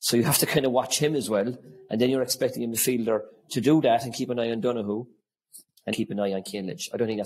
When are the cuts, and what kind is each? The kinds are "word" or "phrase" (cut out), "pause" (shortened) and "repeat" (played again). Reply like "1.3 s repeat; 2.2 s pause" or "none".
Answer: 5.9 s word